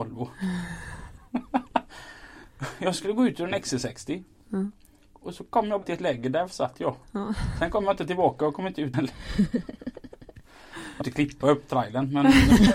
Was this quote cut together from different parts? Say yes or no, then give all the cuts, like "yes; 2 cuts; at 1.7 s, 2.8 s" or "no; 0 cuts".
yes; 3 cuts; at 5.8 s, 8.9 s, 11.0 s